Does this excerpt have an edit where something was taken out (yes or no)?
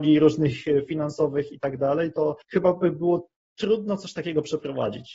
yes